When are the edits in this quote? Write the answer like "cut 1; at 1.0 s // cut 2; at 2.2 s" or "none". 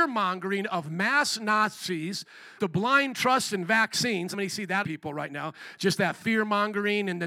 cut 1; at 2.6 s // cut 2; at 4.3 s // cut 3; at 4.8 s